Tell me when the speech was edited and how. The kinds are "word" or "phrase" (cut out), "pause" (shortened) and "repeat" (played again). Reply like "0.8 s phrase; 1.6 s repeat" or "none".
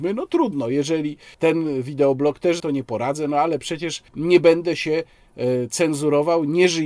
1.3 s pause; 2.6 s phrase; 4.1 s pause